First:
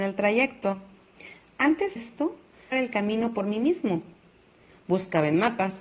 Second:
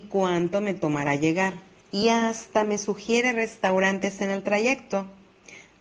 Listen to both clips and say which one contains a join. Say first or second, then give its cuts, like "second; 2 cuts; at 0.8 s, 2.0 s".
first; 2 cuts; at 2.0 s, 2.7 s